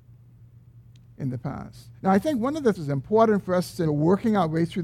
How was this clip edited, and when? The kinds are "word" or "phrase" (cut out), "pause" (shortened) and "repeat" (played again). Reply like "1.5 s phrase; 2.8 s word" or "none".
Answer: 2.0 s pause; 2.7 s word; 3.8 s phrase